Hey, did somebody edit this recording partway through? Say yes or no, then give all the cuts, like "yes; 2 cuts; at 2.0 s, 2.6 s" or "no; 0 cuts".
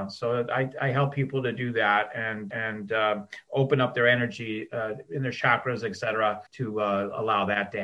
yes; 2 cuts; at 2.5 s, 6.5 s